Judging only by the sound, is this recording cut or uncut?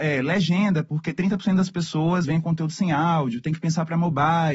cut